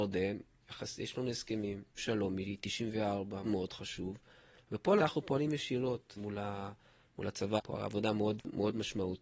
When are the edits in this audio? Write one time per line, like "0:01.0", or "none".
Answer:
0:02.0
0:03.4
0:05.0
0:06.2
0:07.6